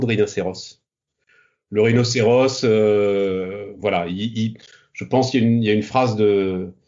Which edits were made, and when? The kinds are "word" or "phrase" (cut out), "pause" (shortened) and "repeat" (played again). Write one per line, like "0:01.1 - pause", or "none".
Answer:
none